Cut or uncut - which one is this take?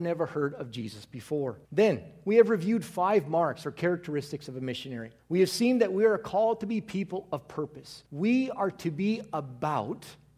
cut